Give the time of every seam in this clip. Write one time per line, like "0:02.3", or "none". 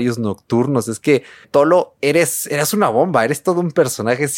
0:01.4